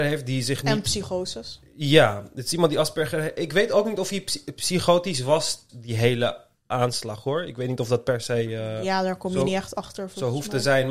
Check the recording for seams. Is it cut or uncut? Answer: cut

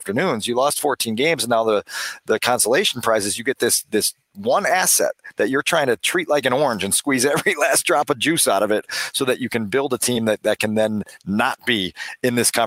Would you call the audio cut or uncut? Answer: uncut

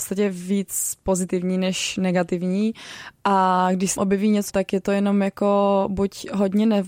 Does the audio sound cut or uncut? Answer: cut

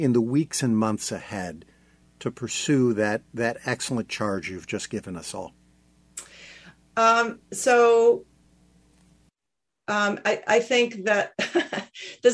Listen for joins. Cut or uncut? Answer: cut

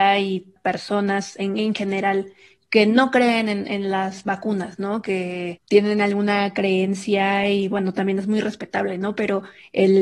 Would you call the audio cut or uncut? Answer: uncut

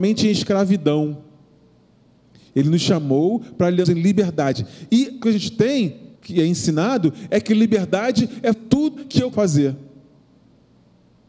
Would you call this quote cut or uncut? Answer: cut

